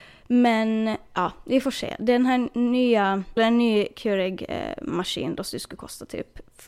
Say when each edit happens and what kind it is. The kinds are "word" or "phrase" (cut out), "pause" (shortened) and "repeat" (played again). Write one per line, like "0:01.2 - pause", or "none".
0:03.4 - word